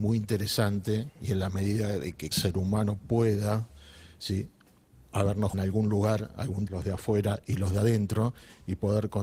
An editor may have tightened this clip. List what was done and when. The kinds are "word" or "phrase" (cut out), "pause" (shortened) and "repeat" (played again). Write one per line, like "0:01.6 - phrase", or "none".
0:02.3 - word
0:05.5 - word
0:06.7 - word